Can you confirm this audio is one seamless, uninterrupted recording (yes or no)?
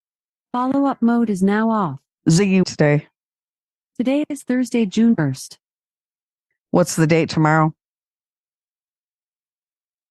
no